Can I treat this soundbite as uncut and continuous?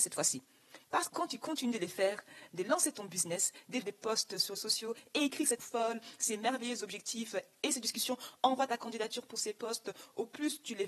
no; 4 cuts; at 1.1 s, 3.8 s, 4.6 s, 5.6 s

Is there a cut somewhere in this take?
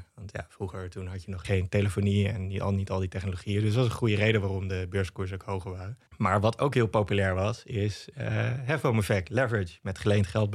yes; 1 cut; at 6.1 s

